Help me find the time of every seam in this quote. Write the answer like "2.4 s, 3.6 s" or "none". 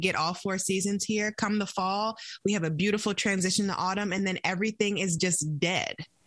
none